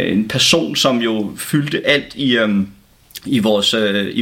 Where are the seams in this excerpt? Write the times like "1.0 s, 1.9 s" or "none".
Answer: none